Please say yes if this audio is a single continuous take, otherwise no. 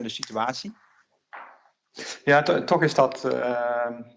yes